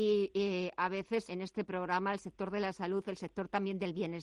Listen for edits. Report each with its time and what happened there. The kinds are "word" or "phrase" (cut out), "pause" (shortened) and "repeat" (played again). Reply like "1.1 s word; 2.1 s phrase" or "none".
1.3 s word